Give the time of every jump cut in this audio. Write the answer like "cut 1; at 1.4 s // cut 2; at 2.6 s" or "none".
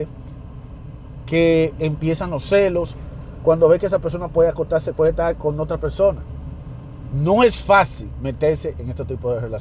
none